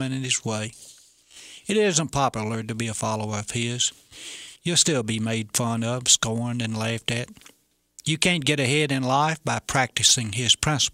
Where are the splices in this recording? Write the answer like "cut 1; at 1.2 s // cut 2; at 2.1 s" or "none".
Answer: cut 1; at 4.6 s